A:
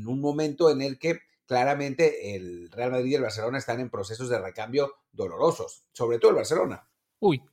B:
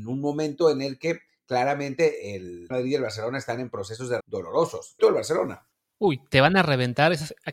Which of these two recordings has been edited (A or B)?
B